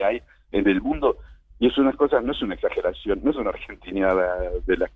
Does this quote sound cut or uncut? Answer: uncut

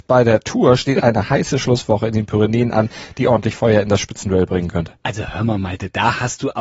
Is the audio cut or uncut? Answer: cut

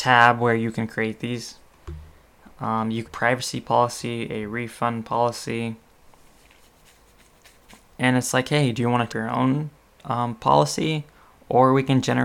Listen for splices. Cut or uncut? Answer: cut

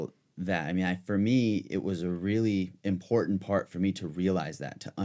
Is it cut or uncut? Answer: cut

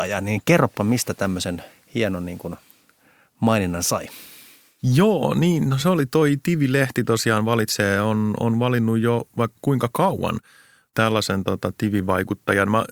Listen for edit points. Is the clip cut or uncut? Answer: uncut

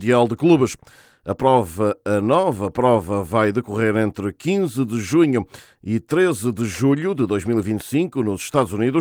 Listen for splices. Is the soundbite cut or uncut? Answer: uncut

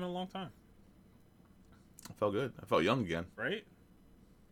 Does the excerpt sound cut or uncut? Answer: cut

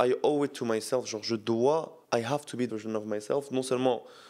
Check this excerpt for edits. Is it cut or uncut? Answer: cut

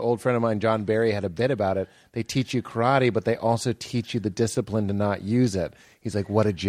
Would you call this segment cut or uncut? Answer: uncut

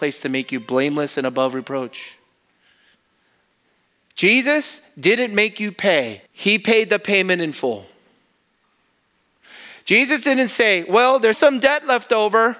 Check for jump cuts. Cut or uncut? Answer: cut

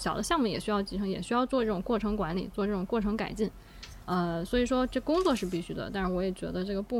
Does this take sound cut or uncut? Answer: cut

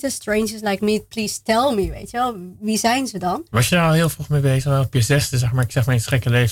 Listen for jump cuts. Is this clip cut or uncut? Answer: uncut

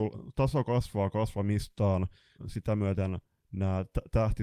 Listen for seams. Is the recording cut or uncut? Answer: cut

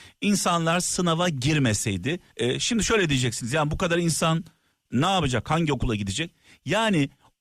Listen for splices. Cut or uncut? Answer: cut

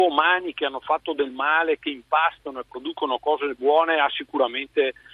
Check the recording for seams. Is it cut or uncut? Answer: uncut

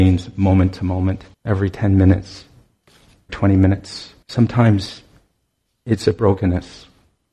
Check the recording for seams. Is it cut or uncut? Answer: cut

